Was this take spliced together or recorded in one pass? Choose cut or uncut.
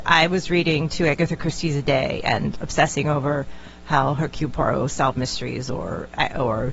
uncut